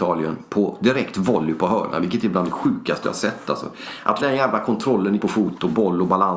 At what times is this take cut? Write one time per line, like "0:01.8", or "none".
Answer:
0:04.2
0:05.2